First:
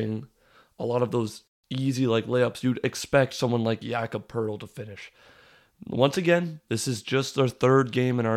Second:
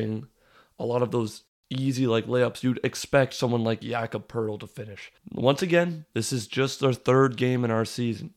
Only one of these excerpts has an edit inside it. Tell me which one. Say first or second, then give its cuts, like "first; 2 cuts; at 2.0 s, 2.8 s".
second; 1 cut; at 5.2 s